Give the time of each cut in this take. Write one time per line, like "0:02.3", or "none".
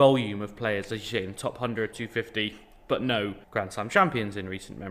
0:01.9
0:03.4